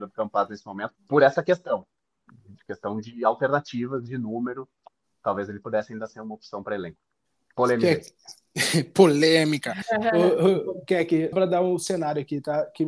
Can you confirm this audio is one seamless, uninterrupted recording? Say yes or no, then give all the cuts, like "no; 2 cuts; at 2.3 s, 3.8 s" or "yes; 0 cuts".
no; 2 cuts; at 1.0 s, 11.3 s